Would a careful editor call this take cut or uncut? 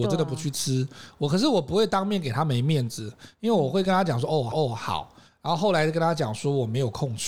cut